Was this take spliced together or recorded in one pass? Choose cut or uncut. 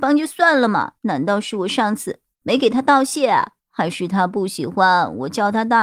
cut